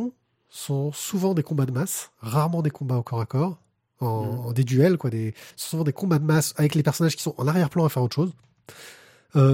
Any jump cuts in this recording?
yes; 1 cut; at 5.5 s

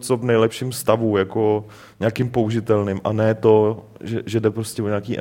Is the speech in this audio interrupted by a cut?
no; 0 cuts

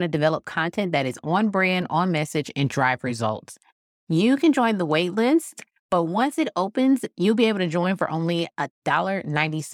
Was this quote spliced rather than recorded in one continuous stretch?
no; 0 cuts

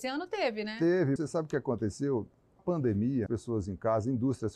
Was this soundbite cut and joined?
yes; 3 cuts; at 1.2 s, 2.6 s, 3.3 s

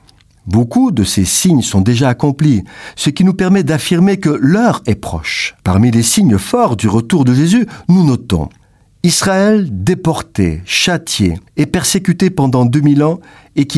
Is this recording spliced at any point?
yes; 3 cuts; at 5.6 s, 8.6 s, 11.5 s

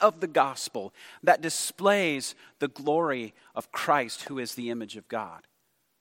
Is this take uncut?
yes; 0 cuts

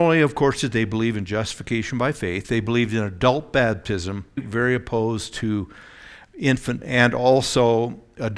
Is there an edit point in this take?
yes; 2 cuts; at 4.4 s, 6.8 s

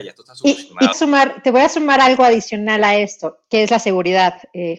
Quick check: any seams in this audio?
yes; 1 cut; at 0.9 s

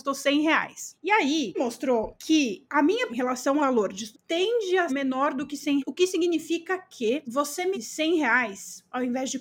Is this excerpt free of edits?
no; 8 cuts; at 1.5 s, 3.1 s, 3.6 s, 4.1 s, 4.9 s, 5.8 s, 7.2 s, 7.7 s

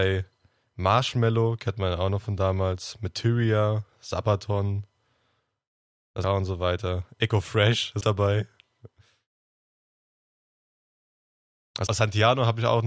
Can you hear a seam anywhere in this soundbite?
yes; 3 cuts; at 6.2 s, 8.0 s, 11.9 s

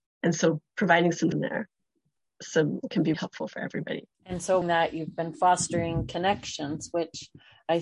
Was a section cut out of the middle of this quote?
yes; 4 cuts; at 1.3 s, 3.1 s, 4.1 s, 4.6 s

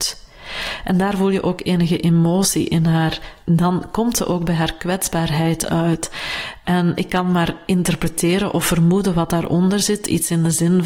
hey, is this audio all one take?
no; 1 cut; at 3.4 s

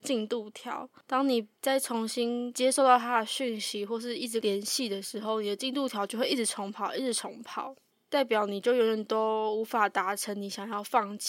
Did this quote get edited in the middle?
no; 0 cuts

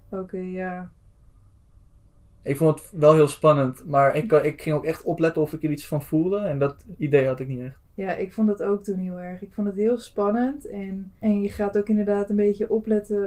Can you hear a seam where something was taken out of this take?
yes; 1 cut; at 7.8 s

